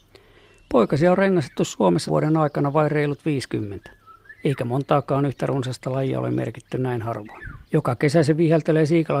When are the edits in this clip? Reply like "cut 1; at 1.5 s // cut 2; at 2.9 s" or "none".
cut 1; at 2.1 s // cut 2; at 7.6 s